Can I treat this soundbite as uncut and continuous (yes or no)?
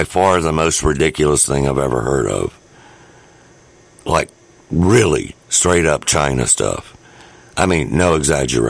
yes